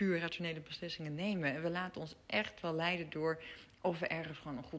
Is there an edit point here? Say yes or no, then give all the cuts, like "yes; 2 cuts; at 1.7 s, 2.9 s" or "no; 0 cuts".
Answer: no; 0 cuts